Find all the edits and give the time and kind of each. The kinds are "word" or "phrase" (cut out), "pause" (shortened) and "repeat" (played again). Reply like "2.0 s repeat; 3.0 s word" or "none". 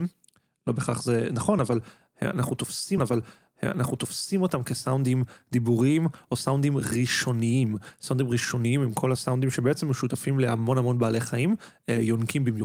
3.0 s repeat